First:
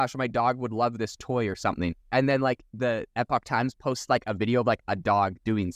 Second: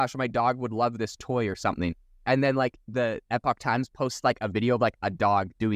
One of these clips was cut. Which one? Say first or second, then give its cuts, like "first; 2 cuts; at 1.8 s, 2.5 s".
first; 1 cut; at 2.0 s